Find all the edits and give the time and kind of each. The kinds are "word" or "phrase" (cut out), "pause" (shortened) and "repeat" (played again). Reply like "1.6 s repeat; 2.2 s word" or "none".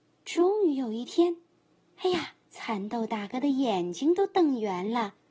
2.4 s pause